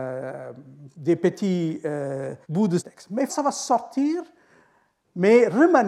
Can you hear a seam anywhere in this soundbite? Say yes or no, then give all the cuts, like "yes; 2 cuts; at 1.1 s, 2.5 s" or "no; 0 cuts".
yes; 3 cuts; at 2.4 s, 2.8 s, 3.3 s